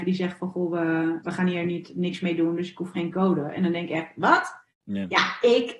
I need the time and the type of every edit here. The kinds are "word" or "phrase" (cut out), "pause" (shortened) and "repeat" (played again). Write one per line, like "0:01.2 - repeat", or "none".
0:01.2 - word
0:04.7 - pause